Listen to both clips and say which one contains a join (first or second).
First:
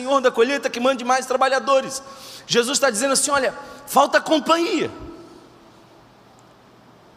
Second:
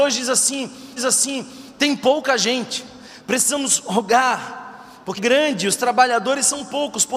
second